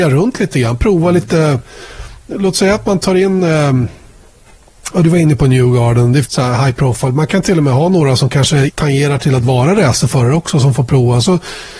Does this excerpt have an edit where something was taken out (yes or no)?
yes